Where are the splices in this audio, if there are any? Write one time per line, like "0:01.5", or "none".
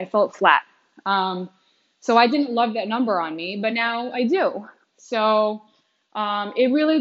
none